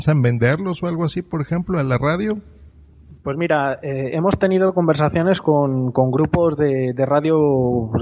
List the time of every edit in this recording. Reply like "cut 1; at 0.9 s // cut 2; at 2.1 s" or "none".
none